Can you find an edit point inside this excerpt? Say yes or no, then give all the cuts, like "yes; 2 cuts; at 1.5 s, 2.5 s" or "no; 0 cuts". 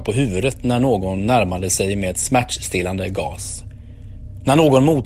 no; 0 cuts